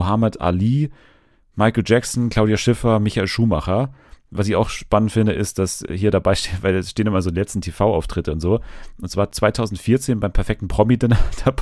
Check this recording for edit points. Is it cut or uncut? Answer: uncut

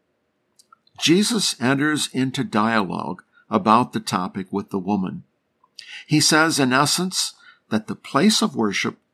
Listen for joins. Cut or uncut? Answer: uncut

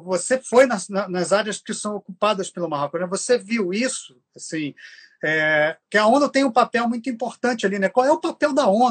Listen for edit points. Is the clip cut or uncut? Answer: cut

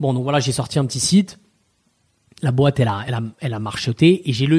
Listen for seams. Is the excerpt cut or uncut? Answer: uncut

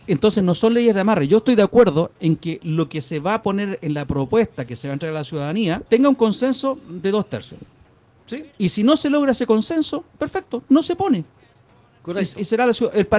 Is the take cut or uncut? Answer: cut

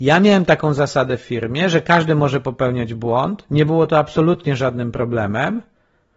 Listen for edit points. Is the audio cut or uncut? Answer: uncut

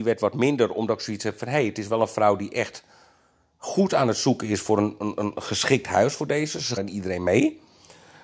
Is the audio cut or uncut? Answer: cut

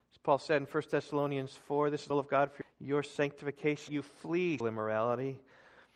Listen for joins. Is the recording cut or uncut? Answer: cut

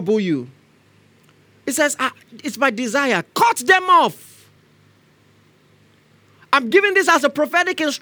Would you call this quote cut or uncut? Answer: uncut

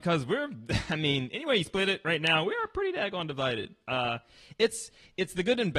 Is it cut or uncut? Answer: uncut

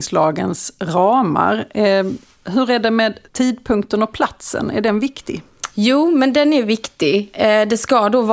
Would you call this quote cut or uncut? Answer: cut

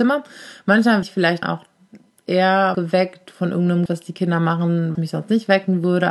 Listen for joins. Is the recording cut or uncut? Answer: cut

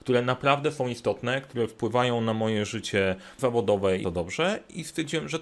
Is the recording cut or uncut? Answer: cut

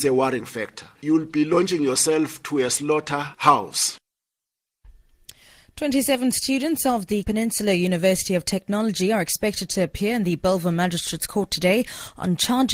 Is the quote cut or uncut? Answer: cut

